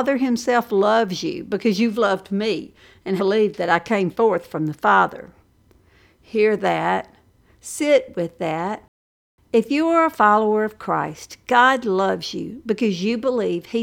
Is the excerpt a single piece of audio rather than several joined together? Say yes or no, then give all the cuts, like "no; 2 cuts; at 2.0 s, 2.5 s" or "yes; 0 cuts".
no; 1 cut; at 3.2 s